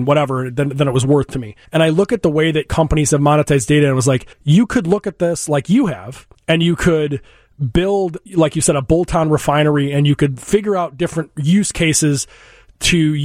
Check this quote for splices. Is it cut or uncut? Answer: cut